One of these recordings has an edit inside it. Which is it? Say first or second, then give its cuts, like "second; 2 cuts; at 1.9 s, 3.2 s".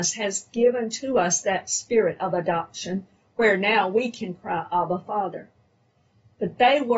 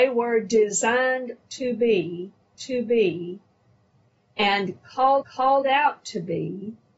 second; 2 cuts; at 2.5 s, 5.2 s